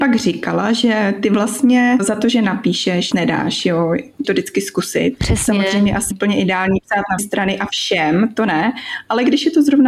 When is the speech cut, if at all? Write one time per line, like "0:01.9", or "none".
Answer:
0:02.0
0:03.1
0:04.2
0:06.1
0:07.2